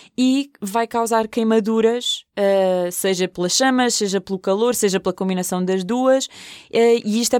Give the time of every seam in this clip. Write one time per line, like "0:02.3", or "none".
none